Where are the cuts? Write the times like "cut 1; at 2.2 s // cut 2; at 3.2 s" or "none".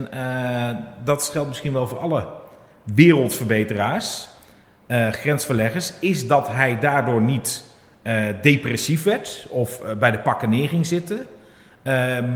none